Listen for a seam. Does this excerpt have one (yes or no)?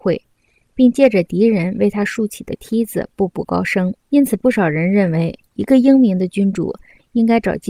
yes